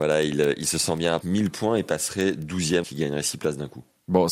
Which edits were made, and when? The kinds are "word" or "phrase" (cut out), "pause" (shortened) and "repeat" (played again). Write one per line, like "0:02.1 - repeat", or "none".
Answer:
0:01.2 - phrase
0:02.8 - word